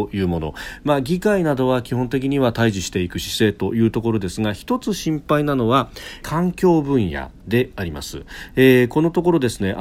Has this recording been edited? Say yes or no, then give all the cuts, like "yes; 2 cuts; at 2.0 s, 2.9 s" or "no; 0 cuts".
yes; 1 cut; at 6.2 s